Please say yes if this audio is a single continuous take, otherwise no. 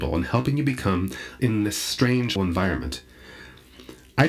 no